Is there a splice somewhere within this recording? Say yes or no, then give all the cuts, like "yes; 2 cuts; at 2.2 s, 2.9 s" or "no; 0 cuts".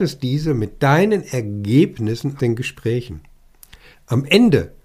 yes; 1 cut; at 2.4 s